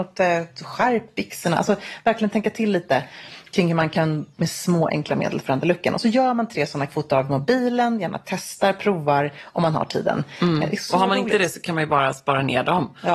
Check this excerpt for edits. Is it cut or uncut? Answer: cut